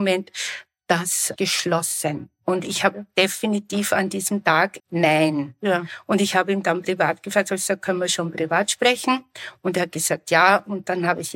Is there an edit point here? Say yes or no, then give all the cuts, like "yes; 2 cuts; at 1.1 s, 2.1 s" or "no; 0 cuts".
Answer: yes; 2 cuts; at 1.4 s, 4.8 s